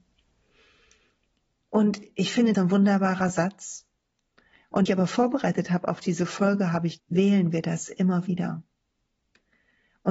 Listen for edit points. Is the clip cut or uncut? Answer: cut